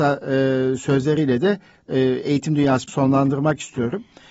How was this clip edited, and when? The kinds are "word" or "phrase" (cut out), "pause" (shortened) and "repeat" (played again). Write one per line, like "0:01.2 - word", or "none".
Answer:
0:02.9 - word

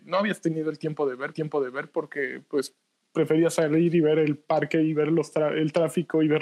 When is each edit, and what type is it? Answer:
0:01.3 - repeat

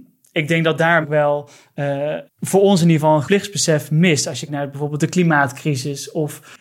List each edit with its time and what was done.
0:01.0 - word
0:02.3 - word
0:03.2 - word
0:04.5 - word

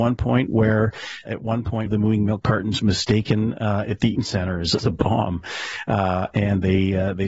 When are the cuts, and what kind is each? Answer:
0:01.3 - word
0:01.9 - word
0:02.8 - word
0:04.2 - word
0:04.8 - word

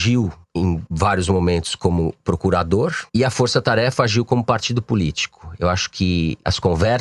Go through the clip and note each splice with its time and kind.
0:03.1 - pause

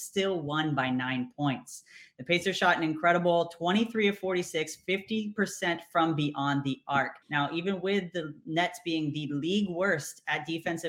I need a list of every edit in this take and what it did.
0:07.2 - pause

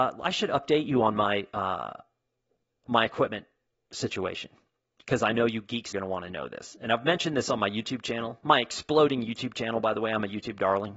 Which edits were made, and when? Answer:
0:05.9 - phrase

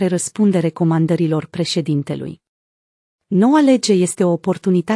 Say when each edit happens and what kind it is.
none

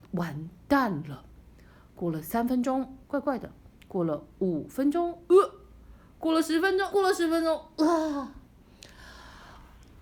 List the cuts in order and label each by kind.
0:03.0 - word
0:06.9 - phrase

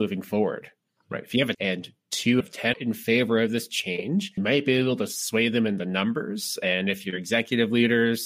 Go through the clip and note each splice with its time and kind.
0:01.5 - phrase
0:02.4 - word
0:02.7 - phrase
0:04.4 - word

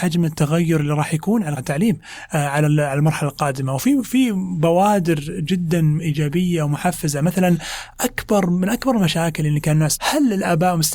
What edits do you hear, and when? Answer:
0:01.6 - word
0:10.0 - word

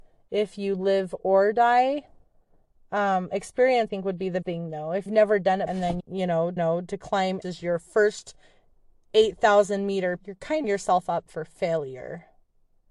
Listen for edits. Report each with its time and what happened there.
0:03.9 - word
0:04.4 - word
0:05.1 - word
0:05.7 - word
0:06.0 - phrase
0:06.6 - repeat
0:07.4 - word
0:10.2 - word
0:10.6 - phrase

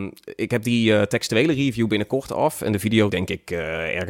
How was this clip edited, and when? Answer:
0:03.1 - word

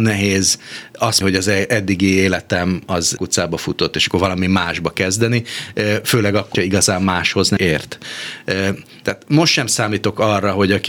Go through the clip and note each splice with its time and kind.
0:01.2 - word
0:03.2 - word
0:06.5 - word
0:07.6 - word

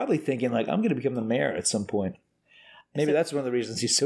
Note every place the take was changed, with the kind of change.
none

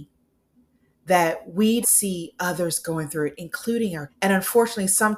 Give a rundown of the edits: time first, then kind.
0:01.8 - word
0:04.1 - word

